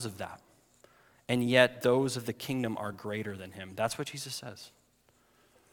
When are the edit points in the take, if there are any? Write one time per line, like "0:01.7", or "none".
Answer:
none